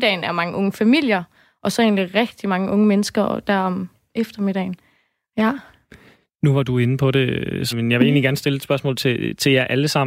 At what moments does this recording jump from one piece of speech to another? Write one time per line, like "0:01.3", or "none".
0:07.7